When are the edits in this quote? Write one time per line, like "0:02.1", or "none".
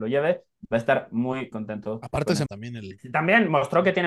0:01.5
0:02.5